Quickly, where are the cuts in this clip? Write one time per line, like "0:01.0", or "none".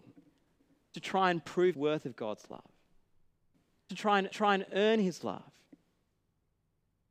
0:00.9
0:01.7
0:03.9
0:04.3